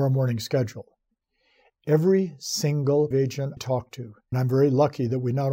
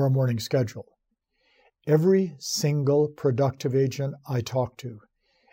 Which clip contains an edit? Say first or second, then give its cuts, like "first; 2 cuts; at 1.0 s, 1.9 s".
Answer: first; 3 cuts; at 3.1 s, 3.6 s, 4.3 s